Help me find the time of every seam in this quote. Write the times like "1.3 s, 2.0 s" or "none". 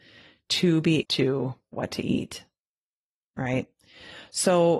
1.0 s, 1.7 s